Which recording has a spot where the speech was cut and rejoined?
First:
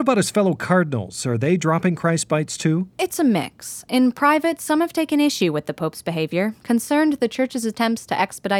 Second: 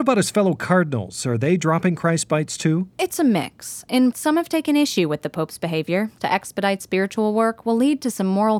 second; 2 cuts; at 4.1 s, 6.2 s

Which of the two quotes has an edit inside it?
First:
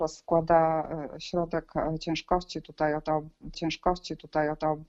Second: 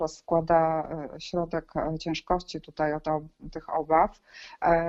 first; 1 cut; at 3.5 s

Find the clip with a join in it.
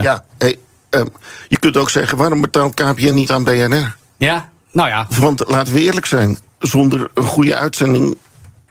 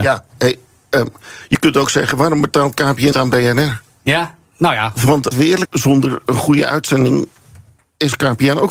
second; 3 cuts; at 3.1 s, 5.3 s, 5.7 s

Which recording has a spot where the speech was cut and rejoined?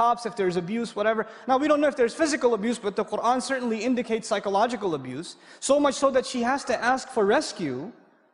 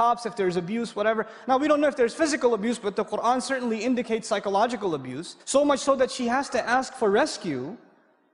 second; 1 cut; at 5.4 s

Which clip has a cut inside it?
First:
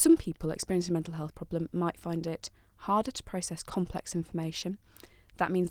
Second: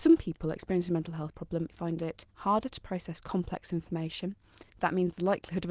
second; 3 cuts; at 1.7 s, 2.3 s, 4.7 s

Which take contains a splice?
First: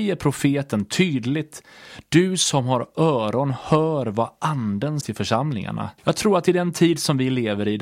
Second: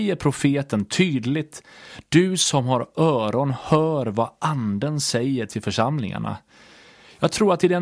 first; 2 cuts; at 5.0 s, 6.0 s

